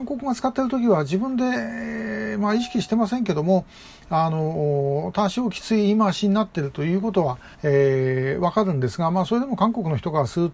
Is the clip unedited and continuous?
no; 1 cut; at 7.5 s

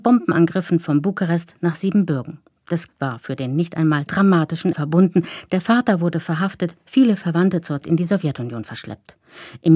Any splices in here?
yes; 4 cuts; at 2.9 s, 4.1 s, 4.7 s, 7.8 s

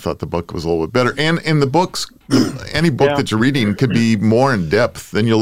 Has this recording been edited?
no; 0 cuts

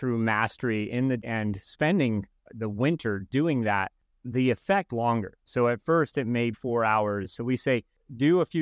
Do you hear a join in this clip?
yes; 4 cuts; at 1.2 s, 4.1 s, 4.9 s, 6.5 s

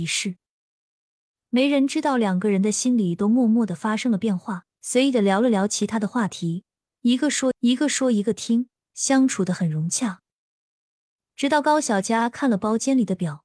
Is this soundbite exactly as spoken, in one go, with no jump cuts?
no; 2 cuts; at 4.7 s, 7.5 s

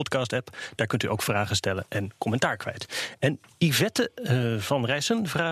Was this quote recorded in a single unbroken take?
yes; 0 cuts

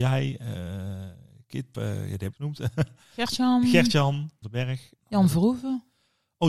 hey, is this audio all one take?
no; 3 cuts; at 1.7 s, 2.3 s, 4.4 s

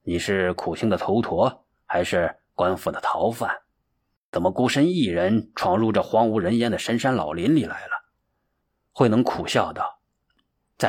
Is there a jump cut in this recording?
no; 0 cuts

